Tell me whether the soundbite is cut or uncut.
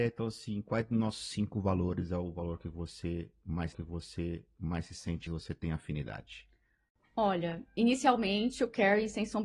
cut